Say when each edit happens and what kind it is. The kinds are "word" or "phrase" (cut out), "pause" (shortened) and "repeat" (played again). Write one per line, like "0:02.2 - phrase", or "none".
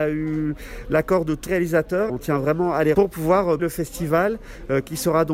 0:01.5 - word
0:02.1 - word
0:02.9 - word
0:03.6 - word